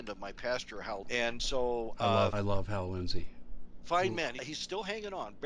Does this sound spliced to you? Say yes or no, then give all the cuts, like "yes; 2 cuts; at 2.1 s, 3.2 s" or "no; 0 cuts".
yes; 4 cuts; at 1.0 s, 1.4 s, 2.3 s, 4.4 s